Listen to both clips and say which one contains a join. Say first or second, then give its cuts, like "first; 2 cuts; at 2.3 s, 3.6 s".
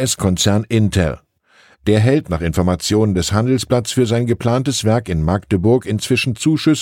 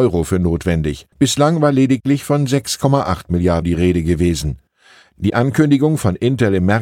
second; 2 cuts; at 1.1 s, 3.6 s